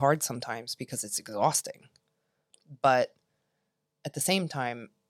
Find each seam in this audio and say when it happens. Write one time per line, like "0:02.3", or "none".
none